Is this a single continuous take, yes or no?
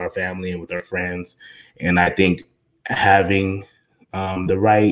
yes